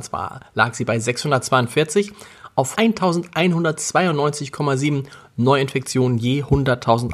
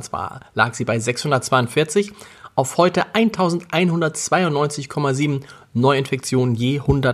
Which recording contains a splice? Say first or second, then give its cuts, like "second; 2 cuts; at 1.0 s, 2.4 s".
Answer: first; 1 cut; at 2.8 s